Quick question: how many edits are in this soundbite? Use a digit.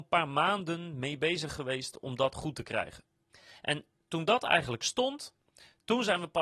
0